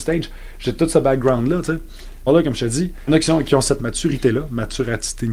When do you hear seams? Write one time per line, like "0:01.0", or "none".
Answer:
0:02.3
0:03.1
0:03.8